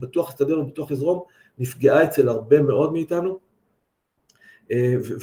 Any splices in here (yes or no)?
no